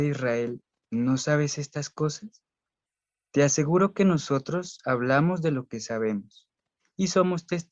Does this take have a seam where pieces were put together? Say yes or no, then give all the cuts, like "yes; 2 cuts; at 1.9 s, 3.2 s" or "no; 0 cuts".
no; 0 cuts